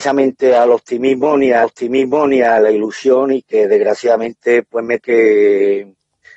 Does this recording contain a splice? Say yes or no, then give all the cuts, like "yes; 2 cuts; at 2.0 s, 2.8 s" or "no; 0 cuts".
yes; 2 cuts; at 1.6 s, 5.0 s